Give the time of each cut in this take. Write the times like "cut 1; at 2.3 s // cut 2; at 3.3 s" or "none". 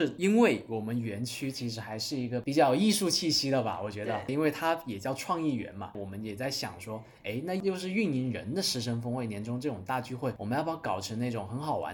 none